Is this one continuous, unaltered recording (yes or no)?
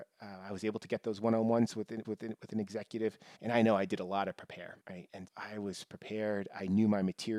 no